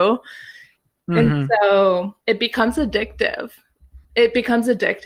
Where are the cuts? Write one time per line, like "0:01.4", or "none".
0:02.2
0:04.0